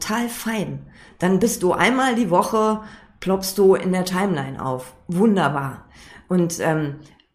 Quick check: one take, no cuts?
yes; 0 cuts

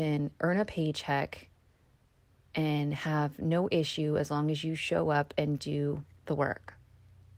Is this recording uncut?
yes; 0 cuts

